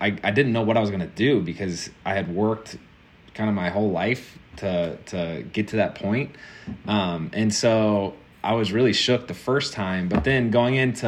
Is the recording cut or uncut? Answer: uncut